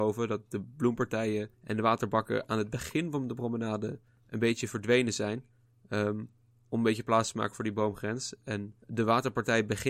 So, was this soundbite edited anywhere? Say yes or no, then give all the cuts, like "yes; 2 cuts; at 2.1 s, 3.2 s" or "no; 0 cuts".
yes; 2 cuts; at 1.5 s, 8.8 s